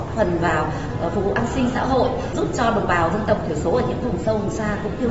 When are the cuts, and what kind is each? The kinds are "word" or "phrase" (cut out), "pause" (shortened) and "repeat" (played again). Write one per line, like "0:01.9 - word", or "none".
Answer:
none